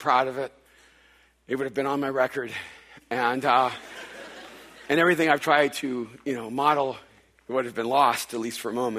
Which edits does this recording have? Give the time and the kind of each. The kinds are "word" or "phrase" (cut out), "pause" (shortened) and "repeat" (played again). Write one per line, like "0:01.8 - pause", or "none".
none